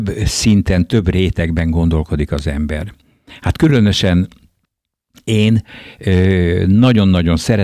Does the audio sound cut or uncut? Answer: uncut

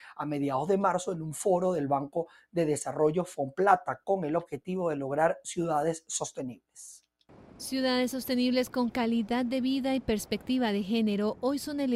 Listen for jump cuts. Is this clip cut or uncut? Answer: uncut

